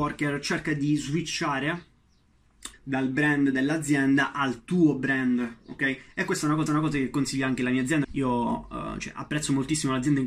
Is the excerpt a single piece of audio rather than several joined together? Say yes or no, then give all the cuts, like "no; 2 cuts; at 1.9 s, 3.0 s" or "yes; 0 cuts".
no; 3 cuts; at 2.7 s, 6.7 s, 8.0 s